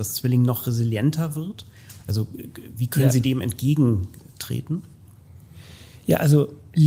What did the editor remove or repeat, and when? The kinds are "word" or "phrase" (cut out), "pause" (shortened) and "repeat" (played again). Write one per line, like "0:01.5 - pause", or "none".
none